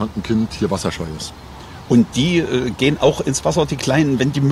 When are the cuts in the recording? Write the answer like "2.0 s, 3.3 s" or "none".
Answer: none